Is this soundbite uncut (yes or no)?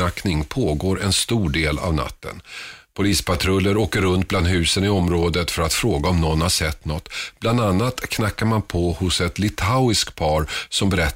yes